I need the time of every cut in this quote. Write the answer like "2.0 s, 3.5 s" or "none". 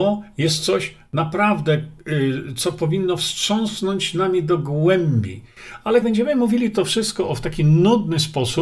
6.0 s